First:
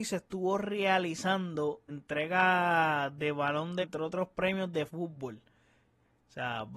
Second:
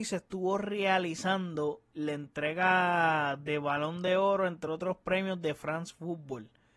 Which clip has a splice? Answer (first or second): first